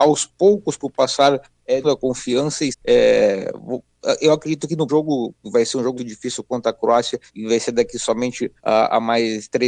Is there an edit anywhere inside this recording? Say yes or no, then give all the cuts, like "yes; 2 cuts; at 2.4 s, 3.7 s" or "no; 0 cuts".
yes; 7 cuts; at 1.8 s, 2.7 s, 4.9 s, 5.4 s, 6.0 s, 7.3 s, 8.6 s